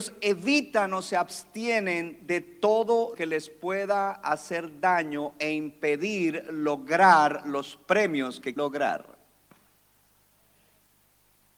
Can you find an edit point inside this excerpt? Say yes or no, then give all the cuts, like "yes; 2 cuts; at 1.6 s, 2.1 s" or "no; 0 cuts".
yes; 2 cuts; at 3.1 s, 8.6 s